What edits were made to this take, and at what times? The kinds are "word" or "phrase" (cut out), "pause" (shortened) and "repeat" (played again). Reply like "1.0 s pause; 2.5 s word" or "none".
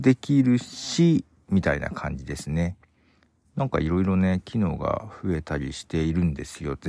none